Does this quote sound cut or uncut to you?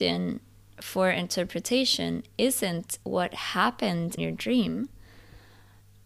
cut